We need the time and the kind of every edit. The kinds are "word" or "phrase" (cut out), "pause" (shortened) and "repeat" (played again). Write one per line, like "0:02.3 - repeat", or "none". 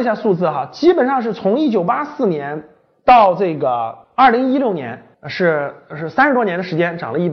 0:05.1 - pause